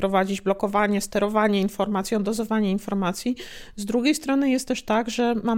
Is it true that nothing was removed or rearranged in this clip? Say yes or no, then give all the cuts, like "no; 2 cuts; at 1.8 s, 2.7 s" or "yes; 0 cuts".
yes; 0 cuts